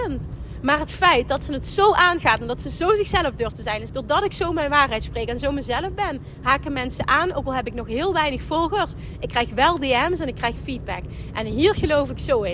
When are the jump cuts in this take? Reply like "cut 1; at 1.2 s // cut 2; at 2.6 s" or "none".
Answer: cut 1; at 3.9 s // cut 2; at 10.6 s

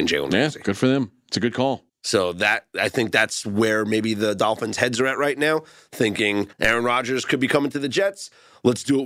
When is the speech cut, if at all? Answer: cut 1; at 1.9 s // cut 2; at 6.5 s

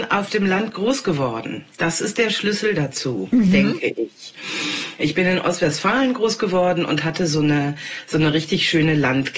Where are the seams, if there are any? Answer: cut 1; at 1.7 s

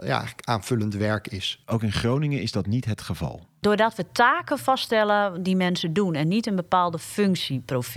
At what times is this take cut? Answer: cut 1; at 1.6 s

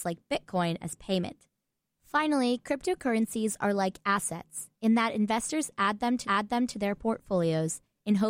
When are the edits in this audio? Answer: cut 1; at 1.7 s // cut 2; at 6.2 s

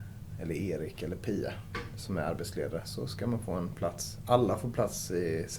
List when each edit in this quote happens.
none

